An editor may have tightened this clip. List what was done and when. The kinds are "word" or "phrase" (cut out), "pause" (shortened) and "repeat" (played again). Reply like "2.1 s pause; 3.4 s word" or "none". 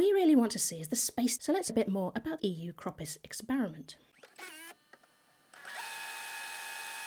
1.4 s word; 1.7 s word; 2.4 s word